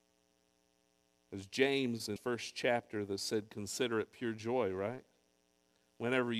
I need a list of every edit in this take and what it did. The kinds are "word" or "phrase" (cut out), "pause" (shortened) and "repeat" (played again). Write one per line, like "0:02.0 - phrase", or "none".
0:02.2 - word